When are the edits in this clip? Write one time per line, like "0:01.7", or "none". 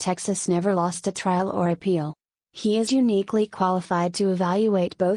none